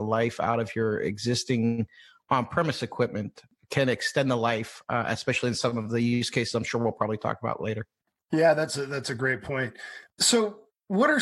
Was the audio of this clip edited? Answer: no; 0 cuts

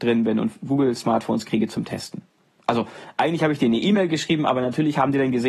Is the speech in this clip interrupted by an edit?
no; 0 cuts

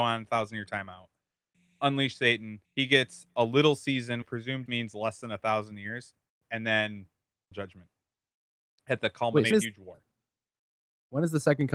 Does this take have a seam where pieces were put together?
yes; 6 cuts; at 2.6 s, 4.2 s, 4.7 s, 6.3 s, 7.5 s, 9.5 s

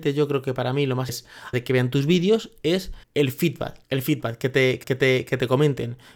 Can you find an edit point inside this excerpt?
yes; 5 cuts; at 1.1 s, 1.5 s, 3.0 s, 3.8 s, 4.8 s

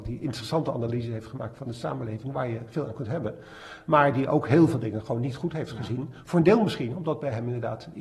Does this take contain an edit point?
no; 0 cuts

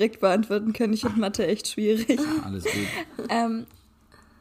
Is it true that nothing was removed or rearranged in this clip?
yes; 0 cuts

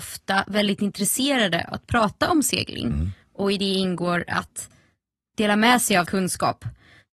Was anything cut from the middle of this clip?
yes; 3 cuts; at 1.7 s, 5.3 s, 6.1 s

